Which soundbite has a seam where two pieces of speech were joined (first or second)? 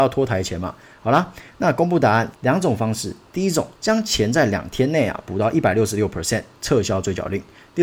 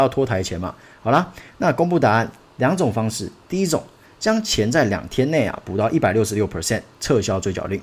first